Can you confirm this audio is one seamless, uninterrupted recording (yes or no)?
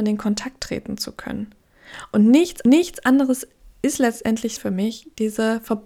no